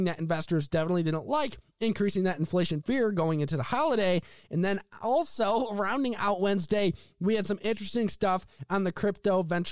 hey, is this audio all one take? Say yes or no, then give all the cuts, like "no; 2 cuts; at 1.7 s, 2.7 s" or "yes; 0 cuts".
yes; 0 cuts